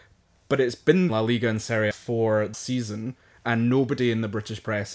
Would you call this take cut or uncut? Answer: cut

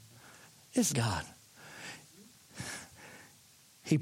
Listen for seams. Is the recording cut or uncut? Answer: cut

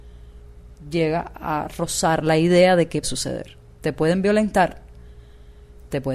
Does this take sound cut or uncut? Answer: cut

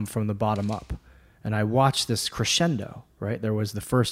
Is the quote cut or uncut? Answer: uncut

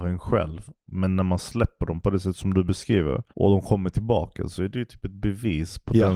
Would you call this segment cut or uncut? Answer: cut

